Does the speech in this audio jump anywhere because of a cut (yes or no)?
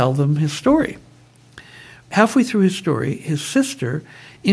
no